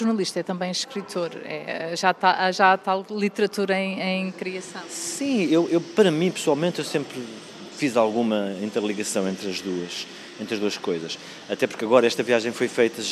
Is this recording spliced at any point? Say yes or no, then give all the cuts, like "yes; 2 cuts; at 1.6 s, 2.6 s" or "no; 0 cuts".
no; 0 cuts